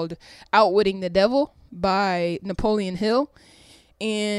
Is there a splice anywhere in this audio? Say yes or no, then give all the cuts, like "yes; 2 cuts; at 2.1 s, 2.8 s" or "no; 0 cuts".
no; 0 cuts